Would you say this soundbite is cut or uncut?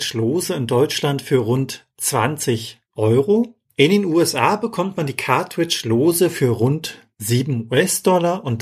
cut